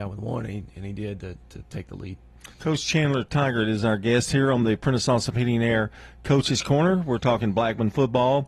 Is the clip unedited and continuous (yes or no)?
no